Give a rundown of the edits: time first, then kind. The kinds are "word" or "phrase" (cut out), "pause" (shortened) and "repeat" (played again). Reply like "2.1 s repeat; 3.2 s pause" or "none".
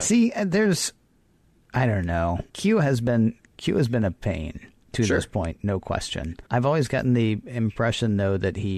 2.5 s pause; 4.8 s pause; 6.5 s pause